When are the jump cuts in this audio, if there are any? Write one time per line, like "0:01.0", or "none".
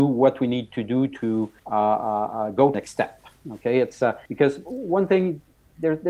0:01.6
0:02.7
0:04.3